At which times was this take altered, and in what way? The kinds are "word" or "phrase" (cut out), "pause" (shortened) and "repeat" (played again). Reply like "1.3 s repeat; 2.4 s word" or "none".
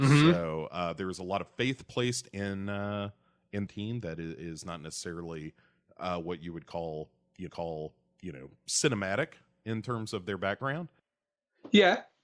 3.7 s phrase; 7.5 s repeat